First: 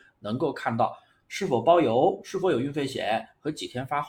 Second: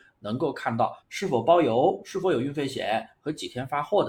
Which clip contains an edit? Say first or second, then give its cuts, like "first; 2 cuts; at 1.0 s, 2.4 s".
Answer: second; 1 cut; at 1.0 s